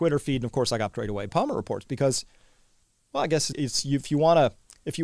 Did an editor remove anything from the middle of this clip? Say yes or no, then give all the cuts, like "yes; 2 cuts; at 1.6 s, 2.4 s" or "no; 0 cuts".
yes; 4 cuts; at 0.9 s, 1.3 s, 2.8 s, 3.5 s